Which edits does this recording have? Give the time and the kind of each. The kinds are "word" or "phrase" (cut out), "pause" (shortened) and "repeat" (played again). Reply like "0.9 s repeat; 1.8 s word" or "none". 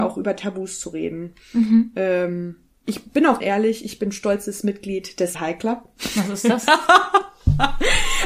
2.7 s pause; 3.4 s phrase; 5.3 s word